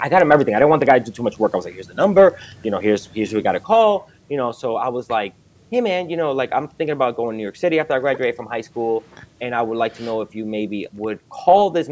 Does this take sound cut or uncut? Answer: uncut